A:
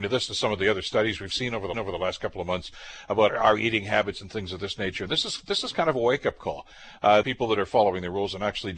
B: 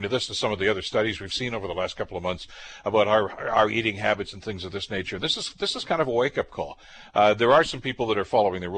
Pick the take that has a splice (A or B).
A